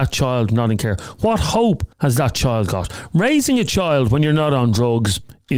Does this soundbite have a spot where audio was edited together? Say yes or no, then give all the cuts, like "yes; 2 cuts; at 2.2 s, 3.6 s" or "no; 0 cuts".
yes; 1 cut; at 1.9 s